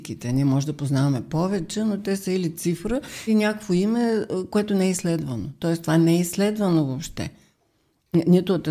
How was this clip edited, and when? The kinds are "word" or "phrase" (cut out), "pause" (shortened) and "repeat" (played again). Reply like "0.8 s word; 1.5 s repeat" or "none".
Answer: 3.3 s word